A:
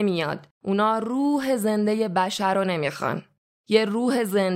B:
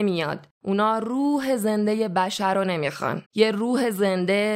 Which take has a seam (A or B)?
B